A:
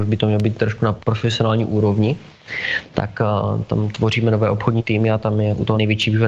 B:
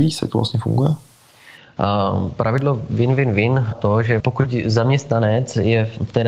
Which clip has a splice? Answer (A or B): B